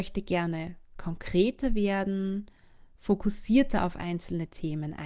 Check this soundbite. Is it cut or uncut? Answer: uncut